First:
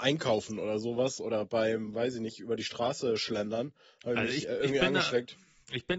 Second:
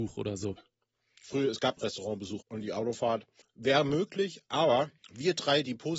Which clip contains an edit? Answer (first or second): second